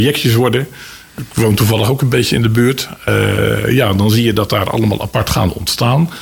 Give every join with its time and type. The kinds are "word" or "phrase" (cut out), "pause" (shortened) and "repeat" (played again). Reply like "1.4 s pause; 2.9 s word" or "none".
none